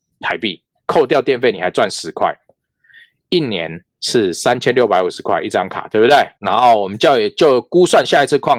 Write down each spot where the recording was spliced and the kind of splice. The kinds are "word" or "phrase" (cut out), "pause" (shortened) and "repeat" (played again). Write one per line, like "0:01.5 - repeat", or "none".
0:03.9 - pause